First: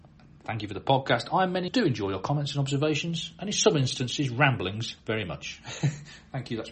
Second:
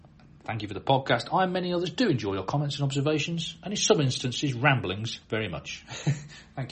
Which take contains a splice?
first; 1 cut; at 1.7 s

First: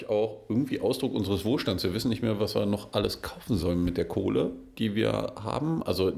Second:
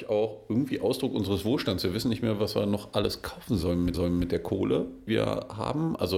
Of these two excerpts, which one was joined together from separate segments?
second; 2 cuts; at 3.9 s, 5.1 s

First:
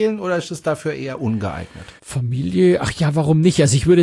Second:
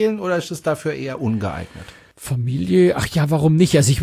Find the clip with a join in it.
first; 1 cut; at 2.0 s

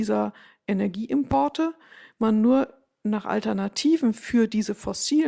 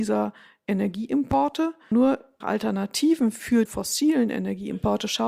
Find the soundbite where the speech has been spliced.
second; 3 cuts; at 1.9 s, 2.4 s, 3.7 s

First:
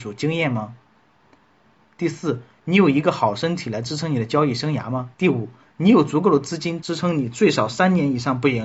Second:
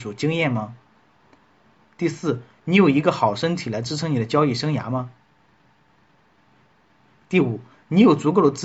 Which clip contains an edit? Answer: first; 1 cut; at 5.1 s

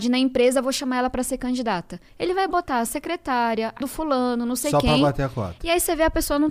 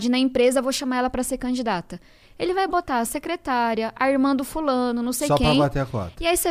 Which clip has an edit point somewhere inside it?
first; 2 cuts; at 2.1 s, 3.8 s

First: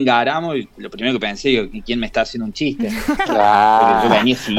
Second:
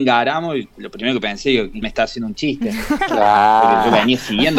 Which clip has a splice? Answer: second; 1 cut; at 1.8 s

